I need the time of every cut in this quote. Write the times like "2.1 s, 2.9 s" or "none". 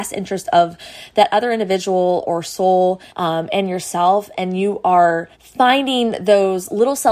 3.1 s, 5.3 s

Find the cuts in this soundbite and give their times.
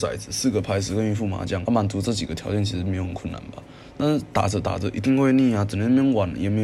1.6 s

